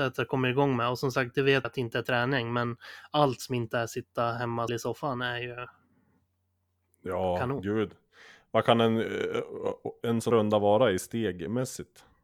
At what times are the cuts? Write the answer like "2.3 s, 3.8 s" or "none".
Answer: 1.6 s, 2.0 s, 4.7 s, 10.3 s